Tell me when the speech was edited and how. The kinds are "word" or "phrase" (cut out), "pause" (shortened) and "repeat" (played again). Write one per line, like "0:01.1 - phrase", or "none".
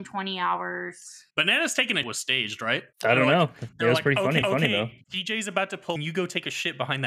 0:01.3 - pause
0:02.0 - word
0:02.9 - pause
0:04.4 - repeat
0:06.0 - phrase

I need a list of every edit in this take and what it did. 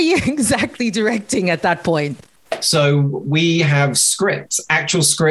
none

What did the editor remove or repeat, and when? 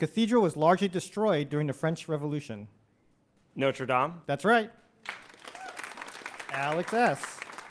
none

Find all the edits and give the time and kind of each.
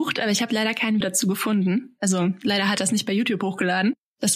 0:01.0 - word

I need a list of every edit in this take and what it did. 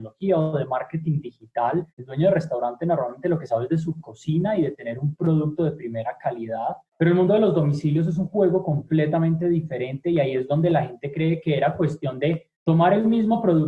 0:01.9 - pause
0:06.9 - pause
0:12.5 - pause

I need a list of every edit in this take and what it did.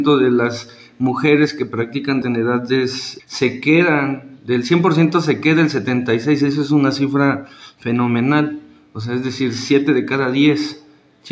0:02.2 - word
0:03.2 - word

